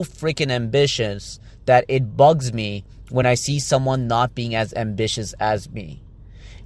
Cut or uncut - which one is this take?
uncut